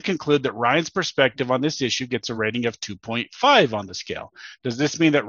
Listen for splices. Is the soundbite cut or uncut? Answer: uncut